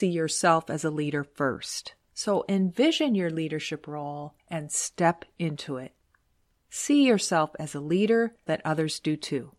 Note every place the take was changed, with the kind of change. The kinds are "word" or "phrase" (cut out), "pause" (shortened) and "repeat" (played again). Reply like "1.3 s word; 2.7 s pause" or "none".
2.0 s pause; 4.4 s pause; 8.5 s word